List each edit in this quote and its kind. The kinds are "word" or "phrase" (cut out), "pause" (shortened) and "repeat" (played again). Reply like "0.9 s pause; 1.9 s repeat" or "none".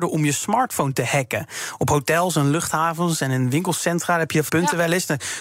4.5 s word